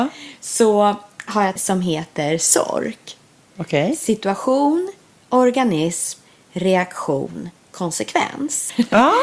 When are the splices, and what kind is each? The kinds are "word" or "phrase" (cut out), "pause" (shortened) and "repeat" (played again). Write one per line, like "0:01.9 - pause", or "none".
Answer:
0:01.6 - phrase